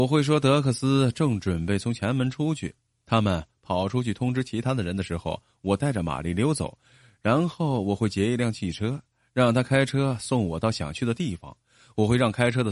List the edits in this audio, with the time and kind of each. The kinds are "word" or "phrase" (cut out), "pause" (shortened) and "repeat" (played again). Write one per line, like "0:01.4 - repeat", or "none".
none